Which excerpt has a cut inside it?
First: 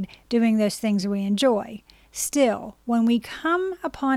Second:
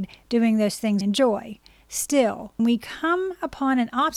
second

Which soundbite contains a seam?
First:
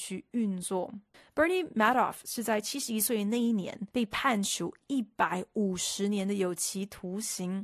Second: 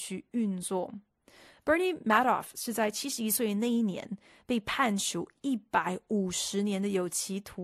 first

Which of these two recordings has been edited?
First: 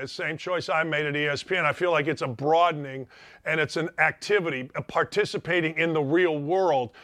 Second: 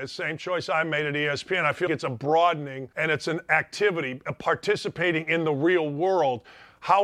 second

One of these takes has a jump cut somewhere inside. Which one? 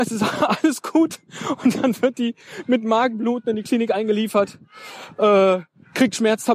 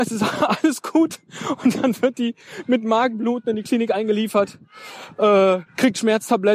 second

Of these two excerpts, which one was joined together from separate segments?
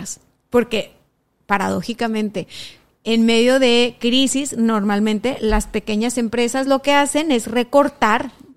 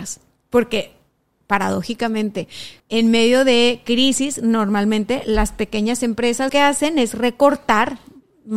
second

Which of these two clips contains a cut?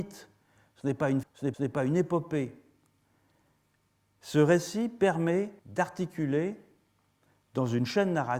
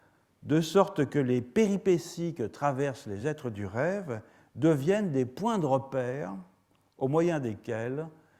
first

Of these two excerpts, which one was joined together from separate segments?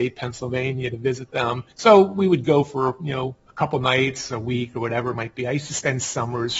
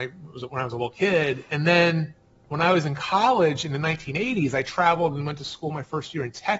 first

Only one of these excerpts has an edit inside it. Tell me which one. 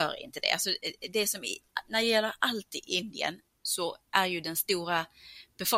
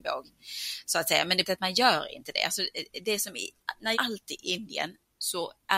second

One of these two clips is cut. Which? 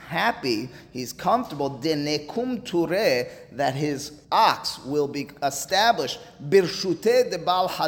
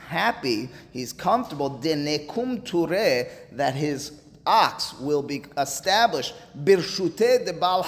first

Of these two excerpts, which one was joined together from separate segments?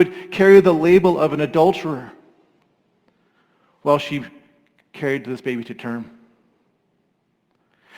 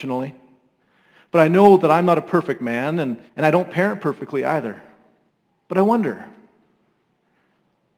second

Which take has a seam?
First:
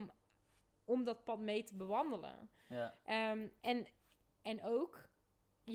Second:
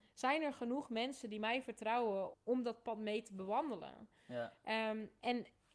second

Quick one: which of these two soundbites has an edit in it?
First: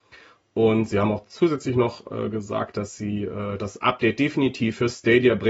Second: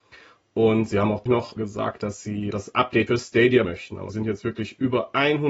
second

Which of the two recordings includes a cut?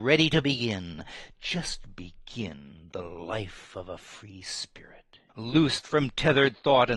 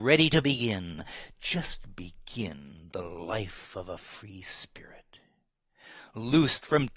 first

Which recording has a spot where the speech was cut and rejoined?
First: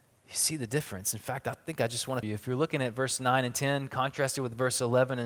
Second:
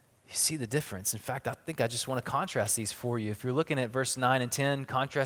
first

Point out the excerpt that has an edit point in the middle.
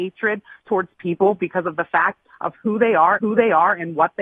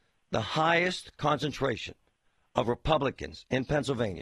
first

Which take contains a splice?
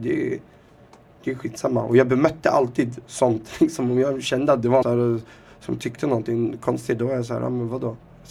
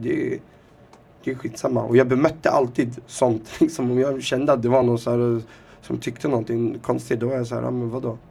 first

